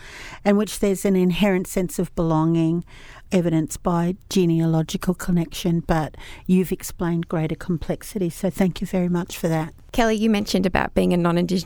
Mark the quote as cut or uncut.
cut